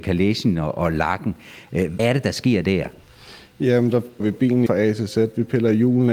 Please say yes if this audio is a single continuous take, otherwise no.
no